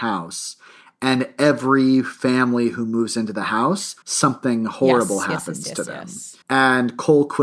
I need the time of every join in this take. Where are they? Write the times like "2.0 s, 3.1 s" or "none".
4.0 s, 6.4 s